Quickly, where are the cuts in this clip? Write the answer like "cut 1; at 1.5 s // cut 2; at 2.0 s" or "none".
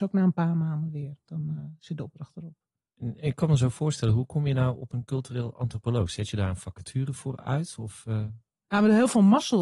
none